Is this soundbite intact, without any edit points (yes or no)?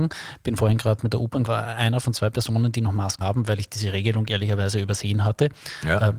no